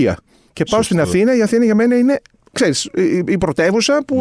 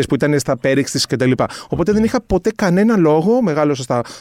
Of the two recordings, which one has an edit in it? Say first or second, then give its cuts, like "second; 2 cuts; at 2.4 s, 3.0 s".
second; 1 cut; at 1.1 s